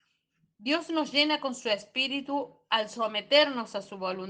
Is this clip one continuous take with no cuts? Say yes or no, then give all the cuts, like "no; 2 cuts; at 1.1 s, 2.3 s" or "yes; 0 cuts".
yes; 0 cuts